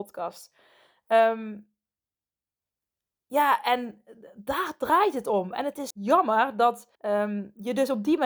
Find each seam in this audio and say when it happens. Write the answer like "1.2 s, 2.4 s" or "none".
5.9 s, 7.0 s